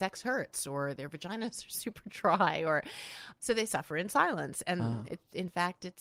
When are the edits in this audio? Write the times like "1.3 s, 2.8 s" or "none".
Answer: 3.4 s